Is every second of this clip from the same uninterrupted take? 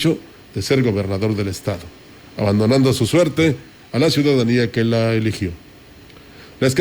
yes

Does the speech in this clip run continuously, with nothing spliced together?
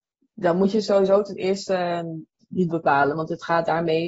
no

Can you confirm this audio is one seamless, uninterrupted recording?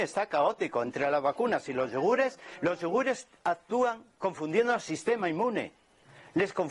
yes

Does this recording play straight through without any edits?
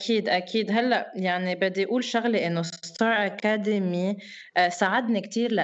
yes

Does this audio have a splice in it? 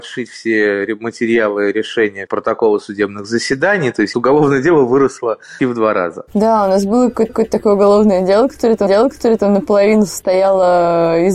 yes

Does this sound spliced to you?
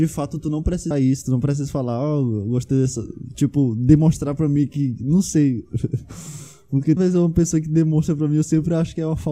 yes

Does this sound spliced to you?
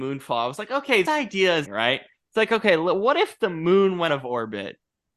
yes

